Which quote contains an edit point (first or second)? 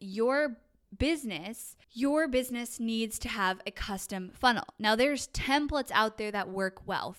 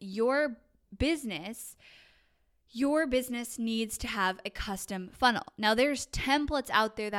first